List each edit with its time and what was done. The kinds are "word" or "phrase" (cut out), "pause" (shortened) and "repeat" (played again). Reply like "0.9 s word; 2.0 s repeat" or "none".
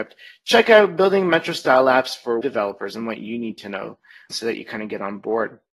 2.4 s word; 4.3 s word